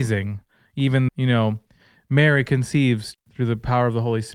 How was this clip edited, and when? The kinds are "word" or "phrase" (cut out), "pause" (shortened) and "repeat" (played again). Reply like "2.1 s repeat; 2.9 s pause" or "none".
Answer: 1.1 s word; 3.1 s word

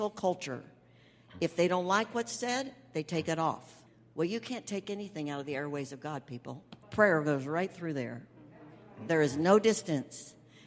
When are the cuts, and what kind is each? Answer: 3.9 s pause; 6.8 s pause

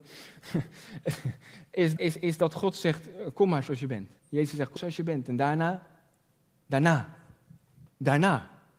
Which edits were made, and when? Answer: 2.0 s word; 4.2 s pause; 4.8 s word

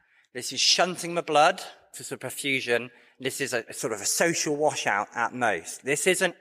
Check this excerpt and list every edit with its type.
none

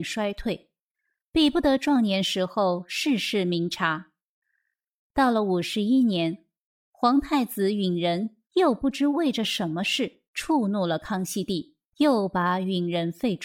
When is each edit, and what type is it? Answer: 8.4 s pause; 10.3 s pause; 11.9 s pause

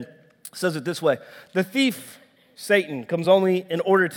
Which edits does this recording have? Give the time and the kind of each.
none

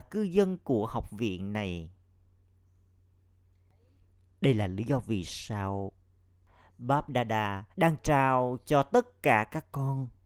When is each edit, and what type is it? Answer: 7.7 s pause

